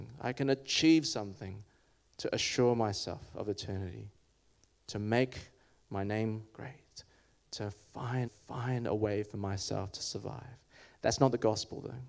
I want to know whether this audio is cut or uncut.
cut